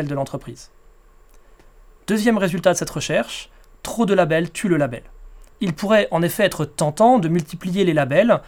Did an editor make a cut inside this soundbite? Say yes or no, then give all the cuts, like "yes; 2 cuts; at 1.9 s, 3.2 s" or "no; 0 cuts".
no; 0 cuts